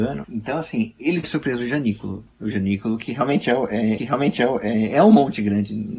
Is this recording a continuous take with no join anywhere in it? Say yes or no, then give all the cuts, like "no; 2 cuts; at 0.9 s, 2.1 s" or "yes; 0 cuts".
no; 2 cuts; at 1.2 s, 4.0 s